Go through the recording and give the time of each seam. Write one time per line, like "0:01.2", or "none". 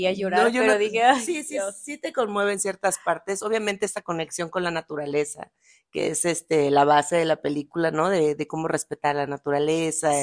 none